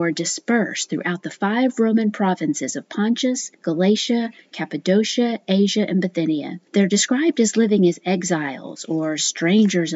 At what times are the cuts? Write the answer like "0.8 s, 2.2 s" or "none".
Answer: 3.5 s, 6.7 s